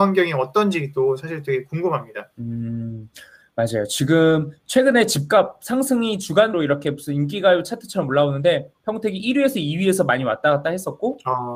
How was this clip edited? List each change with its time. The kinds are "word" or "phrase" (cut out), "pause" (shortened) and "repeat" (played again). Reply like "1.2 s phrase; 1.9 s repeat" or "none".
2.3 s pause; 6.5 s word